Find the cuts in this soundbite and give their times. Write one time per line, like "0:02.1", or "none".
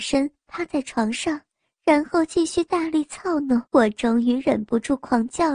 0:03.7